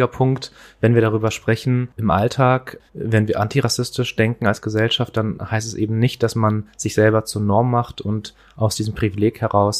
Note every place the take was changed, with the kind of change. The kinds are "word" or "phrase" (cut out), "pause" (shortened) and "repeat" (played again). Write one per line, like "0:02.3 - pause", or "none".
0:02.9 - pause